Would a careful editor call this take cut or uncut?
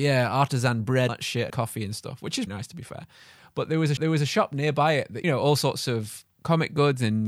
cut